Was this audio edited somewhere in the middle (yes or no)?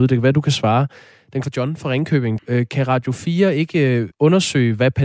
yes